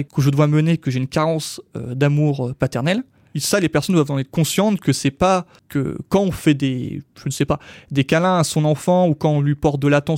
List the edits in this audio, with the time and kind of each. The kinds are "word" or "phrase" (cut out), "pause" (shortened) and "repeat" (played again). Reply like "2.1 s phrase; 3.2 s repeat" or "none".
3.2 s pause